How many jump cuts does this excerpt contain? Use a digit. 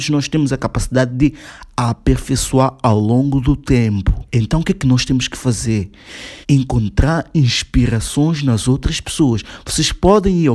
2